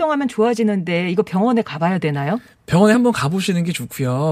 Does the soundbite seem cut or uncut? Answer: uncut